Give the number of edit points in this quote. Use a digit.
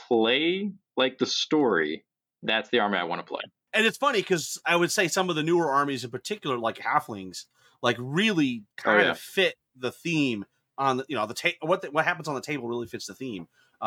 1